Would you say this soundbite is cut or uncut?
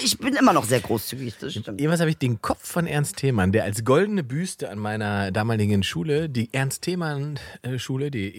uncut